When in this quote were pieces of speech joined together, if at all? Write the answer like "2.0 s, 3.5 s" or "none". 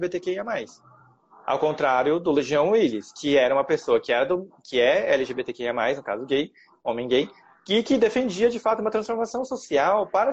none